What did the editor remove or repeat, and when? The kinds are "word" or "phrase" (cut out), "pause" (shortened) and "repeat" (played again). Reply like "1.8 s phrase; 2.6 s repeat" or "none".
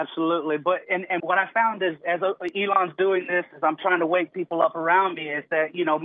1.2 s word